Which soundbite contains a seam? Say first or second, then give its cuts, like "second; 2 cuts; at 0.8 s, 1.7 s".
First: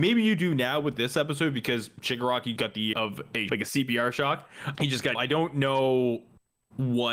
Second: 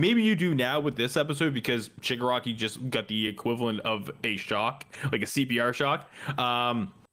first; 5 cuts; at 2.6 s, 2.9 s, 3.5 s, 4.7 s, 5.1 s